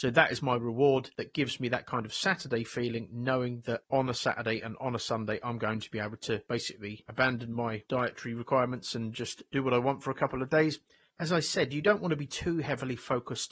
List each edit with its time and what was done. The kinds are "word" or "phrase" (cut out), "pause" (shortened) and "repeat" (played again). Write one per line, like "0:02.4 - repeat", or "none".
none